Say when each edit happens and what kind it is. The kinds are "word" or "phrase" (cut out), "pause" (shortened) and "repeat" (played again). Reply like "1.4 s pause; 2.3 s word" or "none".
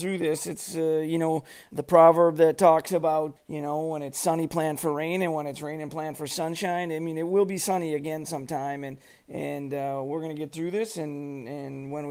none